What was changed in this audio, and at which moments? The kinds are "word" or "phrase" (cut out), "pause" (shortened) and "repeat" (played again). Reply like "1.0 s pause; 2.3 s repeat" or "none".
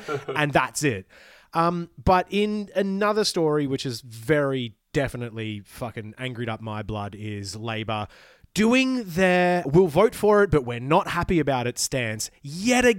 9.6 s word